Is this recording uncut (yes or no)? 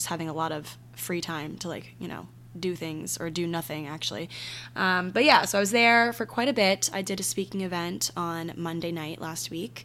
yes